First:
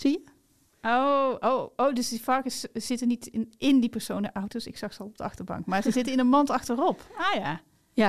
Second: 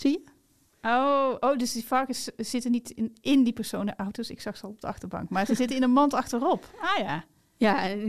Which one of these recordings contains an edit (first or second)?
second